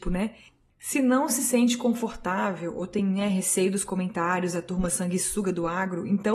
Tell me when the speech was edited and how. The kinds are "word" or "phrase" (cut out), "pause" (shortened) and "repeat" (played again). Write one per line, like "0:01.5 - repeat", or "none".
none